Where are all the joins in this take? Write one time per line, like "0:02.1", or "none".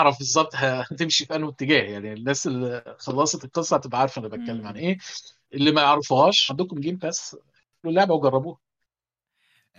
0:05.5
0:06.5
0:07.8

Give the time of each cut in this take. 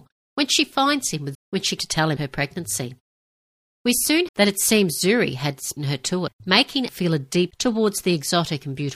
0:01.3
0:01.8
0:02.2
0:04.3
0:05.8
0:06.3
0:06.9
0:07.5

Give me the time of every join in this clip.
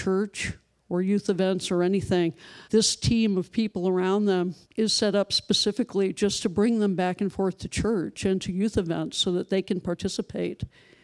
0:02.6
0:04.6

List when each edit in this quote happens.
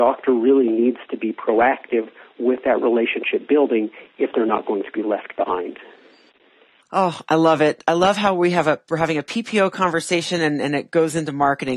none

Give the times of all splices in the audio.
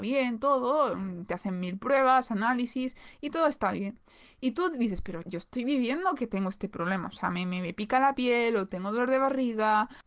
0:05.2

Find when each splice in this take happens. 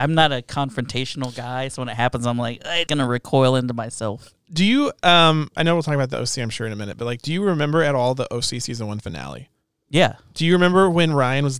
0:02.9
0:09.7

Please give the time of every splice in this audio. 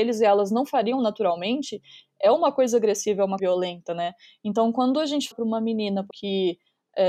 0:03.4
0:05.3
0:06.1

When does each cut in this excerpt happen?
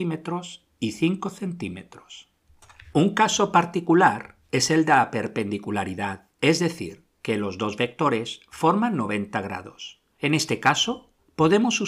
0:06.3
0:10.1

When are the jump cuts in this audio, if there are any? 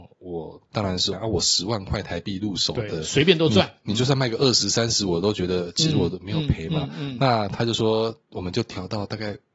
0:01.1

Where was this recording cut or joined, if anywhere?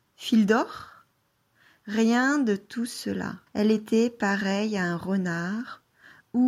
0:03.5

